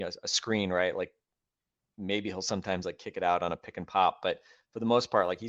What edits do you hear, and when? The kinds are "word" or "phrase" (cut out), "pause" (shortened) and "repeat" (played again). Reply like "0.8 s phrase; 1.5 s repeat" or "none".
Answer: none